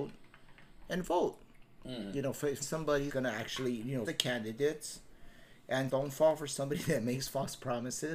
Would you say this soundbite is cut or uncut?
cut